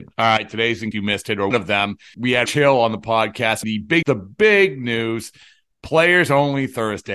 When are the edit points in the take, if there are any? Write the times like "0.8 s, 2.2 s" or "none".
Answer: 0.9 s, 1.5 s, 2.1 s, 2.5 s, 3.6 s, 4.0 s